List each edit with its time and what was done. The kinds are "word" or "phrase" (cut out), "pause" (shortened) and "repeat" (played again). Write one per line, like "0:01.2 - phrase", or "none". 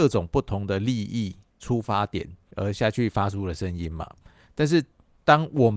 0:02.5 - word